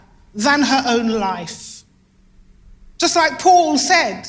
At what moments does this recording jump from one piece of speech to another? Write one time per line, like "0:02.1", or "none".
none